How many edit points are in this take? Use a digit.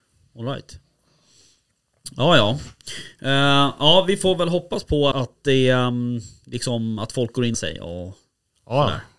2